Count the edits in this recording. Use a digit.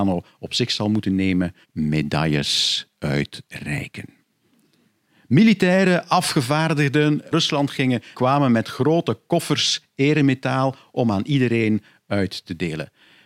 3